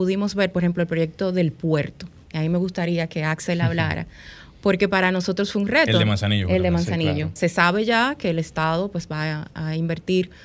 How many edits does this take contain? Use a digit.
1